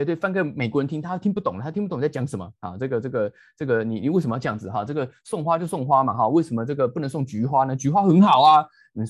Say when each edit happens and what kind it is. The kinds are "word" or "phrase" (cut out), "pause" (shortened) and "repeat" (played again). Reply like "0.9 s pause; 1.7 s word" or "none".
none